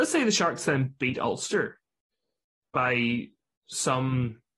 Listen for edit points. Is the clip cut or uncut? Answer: cut